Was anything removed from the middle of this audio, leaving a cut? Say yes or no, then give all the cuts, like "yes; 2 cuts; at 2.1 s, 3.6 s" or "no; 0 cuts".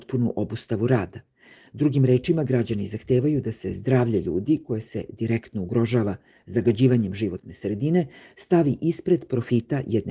no; 0 cuts